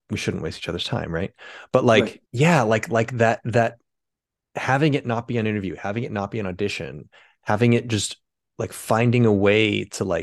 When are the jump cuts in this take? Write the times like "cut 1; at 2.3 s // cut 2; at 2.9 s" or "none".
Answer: cut 1; at 2.3 s